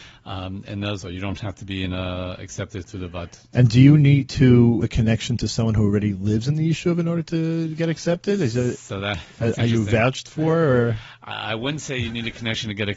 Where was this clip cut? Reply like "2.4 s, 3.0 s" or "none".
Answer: 1.0 s, 4.8 s